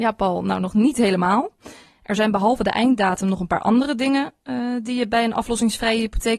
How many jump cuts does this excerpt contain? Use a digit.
0